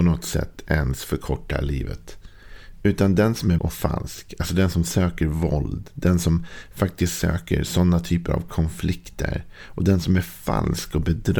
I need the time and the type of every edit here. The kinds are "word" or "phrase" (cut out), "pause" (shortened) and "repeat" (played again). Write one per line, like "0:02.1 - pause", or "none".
0:03.6 - word